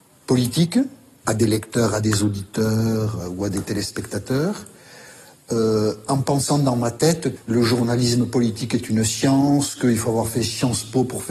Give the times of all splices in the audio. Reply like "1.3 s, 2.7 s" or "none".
1.2 s, 3.2 s, 7.4 s